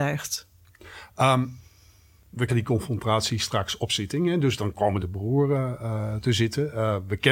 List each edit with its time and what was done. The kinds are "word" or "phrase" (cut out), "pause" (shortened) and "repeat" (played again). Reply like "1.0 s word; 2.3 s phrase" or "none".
2.5 s word; 5.0 s phrase